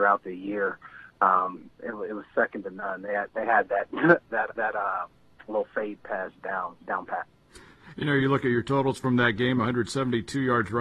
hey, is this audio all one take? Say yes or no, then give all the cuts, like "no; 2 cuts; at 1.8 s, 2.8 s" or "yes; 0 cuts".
no; 2 cuts; at 4.5 s, 6.8 s